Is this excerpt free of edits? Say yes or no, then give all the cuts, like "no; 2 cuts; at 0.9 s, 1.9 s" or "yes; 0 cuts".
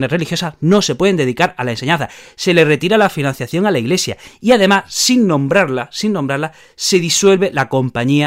yes; 0 cuts